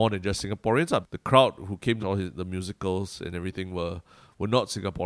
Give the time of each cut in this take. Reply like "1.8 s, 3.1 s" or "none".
1.0 s, 2.0 s